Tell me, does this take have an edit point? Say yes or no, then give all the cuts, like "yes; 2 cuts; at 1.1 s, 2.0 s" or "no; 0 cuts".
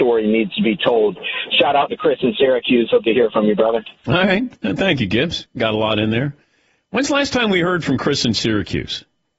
no; 0 cuts